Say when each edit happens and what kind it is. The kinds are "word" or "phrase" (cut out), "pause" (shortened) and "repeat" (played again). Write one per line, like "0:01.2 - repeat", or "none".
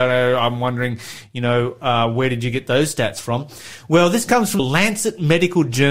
0:04.6 - word

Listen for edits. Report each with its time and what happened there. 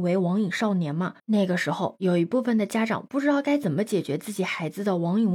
0:01.2 - pause

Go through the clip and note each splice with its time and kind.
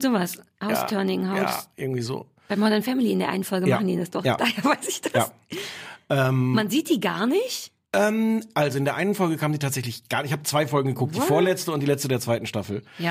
0:07.8 - pause

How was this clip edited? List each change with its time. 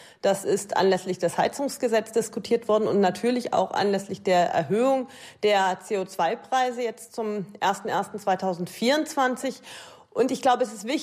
none

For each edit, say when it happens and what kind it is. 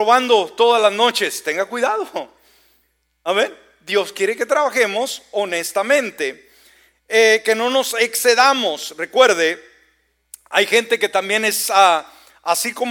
none

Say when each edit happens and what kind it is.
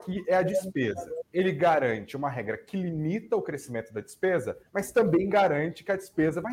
0:04.7 - pause

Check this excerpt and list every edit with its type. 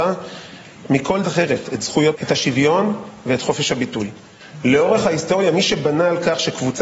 0:01.2 - word
0:02.1 - word

